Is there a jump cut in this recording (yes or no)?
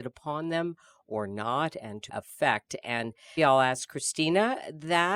yes